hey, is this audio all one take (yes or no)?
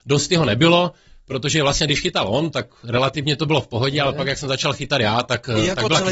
yes